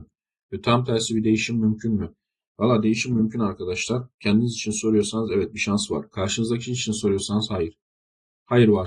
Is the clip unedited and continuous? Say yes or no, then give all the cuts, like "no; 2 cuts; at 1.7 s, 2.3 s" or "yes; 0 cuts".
yes; 0 cuts